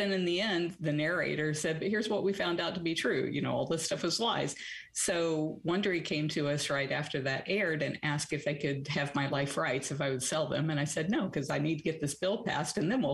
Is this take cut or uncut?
uncut